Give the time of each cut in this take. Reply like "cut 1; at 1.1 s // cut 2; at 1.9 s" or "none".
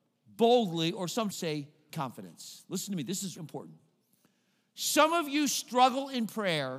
cut 1; at 1.3 s // cut 2; at 1.9 s // cut 3; at 3.4 s